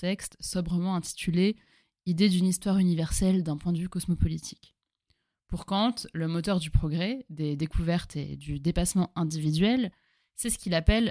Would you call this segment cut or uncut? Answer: uncut